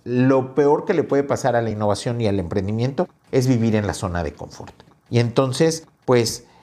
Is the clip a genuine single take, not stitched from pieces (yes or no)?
yes